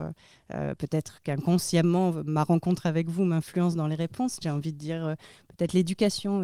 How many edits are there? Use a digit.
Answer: 1